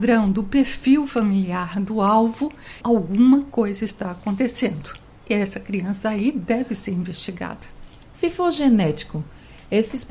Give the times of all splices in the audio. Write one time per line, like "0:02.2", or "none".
0:02.8